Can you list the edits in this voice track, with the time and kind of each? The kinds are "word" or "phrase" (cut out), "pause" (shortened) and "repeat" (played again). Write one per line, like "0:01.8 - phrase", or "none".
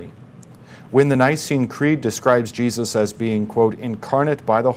none